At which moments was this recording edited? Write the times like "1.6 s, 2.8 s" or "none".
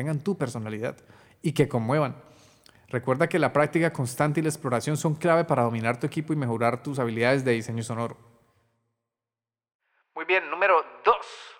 none